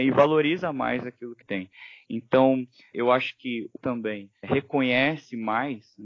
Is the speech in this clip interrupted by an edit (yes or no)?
yes